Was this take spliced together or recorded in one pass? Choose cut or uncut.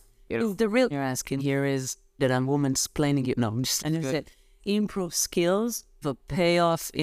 cut